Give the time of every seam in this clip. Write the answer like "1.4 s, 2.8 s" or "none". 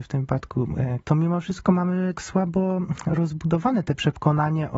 1.0 s, 2.2 s